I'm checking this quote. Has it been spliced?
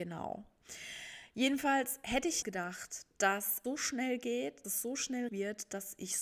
yes; 4 cuts; at 2.4 s, 3.6 s, 4.6 s, 5.3 s

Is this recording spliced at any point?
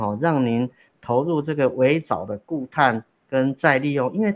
no; 0 cuts

